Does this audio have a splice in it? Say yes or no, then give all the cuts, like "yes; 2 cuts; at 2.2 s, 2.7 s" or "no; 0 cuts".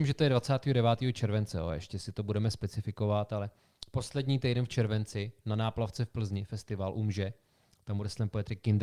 no; 0 cuts